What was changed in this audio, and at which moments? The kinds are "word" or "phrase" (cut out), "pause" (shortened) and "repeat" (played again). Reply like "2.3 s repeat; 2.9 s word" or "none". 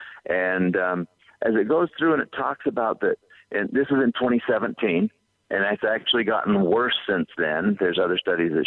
none